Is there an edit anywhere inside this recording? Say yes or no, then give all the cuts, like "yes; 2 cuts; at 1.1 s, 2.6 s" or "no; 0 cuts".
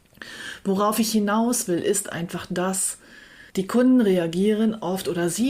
yes; 1 cut; at 3.5 s